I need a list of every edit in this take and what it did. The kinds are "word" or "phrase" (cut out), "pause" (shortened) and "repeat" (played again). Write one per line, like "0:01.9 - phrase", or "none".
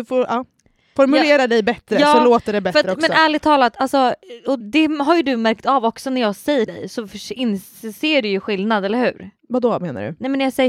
0:04.6 - word
0:06.7 - word
0:09.4 - pause